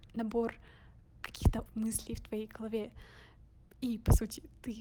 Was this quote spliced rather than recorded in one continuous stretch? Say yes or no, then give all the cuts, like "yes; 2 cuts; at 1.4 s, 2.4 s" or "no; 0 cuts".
yes; 1 cut; at 1.7 s